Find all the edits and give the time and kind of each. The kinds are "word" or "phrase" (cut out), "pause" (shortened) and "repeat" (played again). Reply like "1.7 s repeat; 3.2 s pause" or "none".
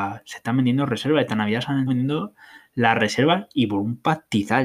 1.9 s word

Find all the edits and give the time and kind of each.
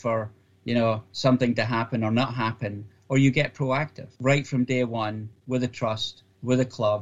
4.2 s pause

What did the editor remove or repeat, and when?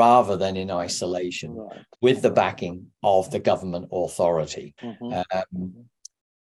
1.9 s pause; 4.8 s pause

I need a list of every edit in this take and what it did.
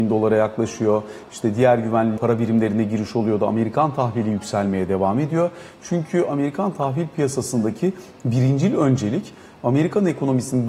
2.2 s word

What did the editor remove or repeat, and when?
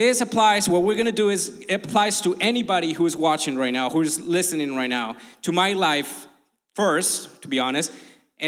none

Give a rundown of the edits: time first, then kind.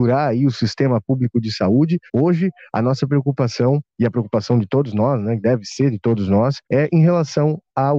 2.1 s pause; 6.6 s pause

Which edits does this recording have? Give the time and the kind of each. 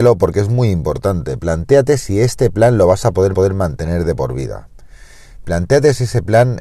3.3 s repeat

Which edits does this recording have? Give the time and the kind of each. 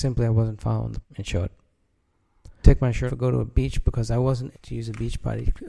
1.0 s word; 2.6 s word; 3.1 s word; 4.5 s word

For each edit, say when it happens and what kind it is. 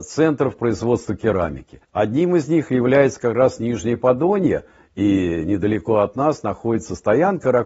1.8 s pause

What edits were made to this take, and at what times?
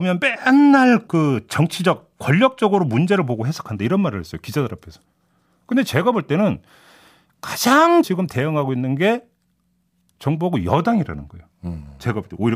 1.1 s word; 8.0 s word

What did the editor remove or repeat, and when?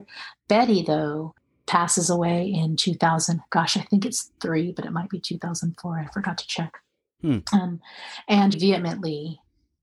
8.5 s word

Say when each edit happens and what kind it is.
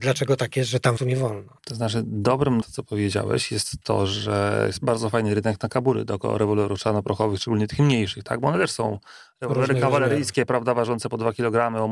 1.0 s word; 1.6 s pause; 2.6 s phrase

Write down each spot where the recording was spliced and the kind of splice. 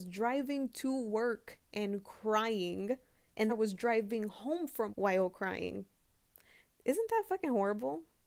3.5 s word; 4.9 s word

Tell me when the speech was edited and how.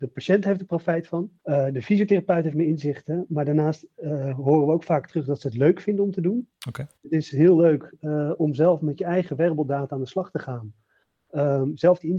1.4 s pause; 7.0 s pause

